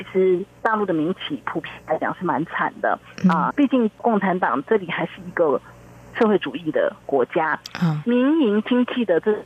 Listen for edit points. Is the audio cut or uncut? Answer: cut